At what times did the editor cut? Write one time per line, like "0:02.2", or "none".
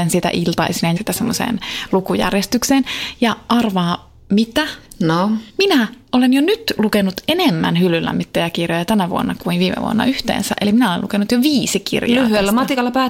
0:01.0
0:05.5